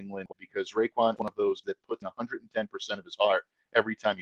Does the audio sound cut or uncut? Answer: cut